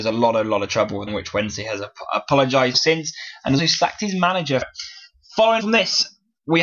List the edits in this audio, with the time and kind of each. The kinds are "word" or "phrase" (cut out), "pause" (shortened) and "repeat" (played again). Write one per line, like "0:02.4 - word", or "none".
0:01.1 - word
0:02.7 - word
0:03.6 - word
0:04.6 - word
0:05.6 - word